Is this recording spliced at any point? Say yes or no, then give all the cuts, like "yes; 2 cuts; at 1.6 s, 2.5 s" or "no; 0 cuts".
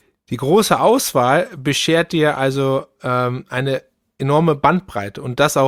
no; 0 cuts